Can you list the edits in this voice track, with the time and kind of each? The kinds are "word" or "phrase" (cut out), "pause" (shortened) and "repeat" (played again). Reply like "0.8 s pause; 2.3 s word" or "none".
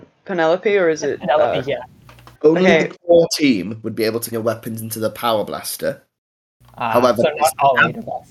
2.4 s pause; 4.3 s word